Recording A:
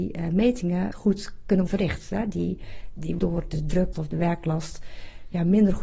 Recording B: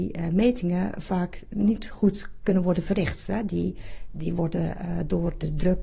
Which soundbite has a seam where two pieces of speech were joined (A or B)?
A